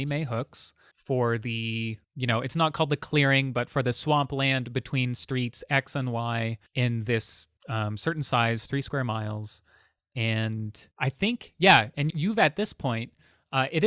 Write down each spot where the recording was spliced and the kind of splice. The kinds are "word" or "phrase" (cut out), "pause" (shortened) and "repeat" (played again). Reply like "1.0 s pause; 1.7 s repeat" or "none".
2.0 s pause; 6.7 s pause; 7.6 s pause; 10.9 s pause; 12.1 s word